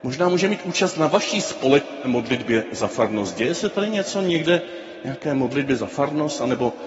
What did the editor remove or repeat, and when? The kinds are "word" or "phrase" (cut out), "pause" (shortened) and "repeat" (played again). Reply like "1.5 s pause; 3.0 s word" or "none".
none